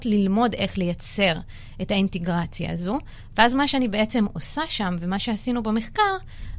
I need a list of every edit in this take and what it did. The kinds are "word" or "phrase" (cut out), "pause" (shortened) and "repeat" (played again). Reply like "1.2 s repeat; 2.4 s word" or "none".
none